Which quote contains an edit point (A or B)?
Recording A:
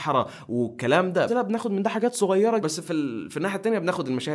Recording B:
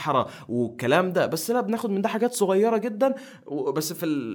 A